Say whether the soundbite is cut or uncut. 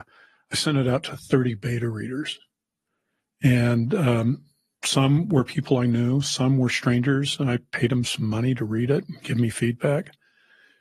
uncut